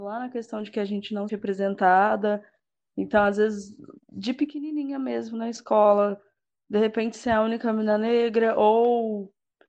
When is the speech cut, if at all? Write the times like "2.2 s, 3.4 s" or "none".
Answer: 1.3 s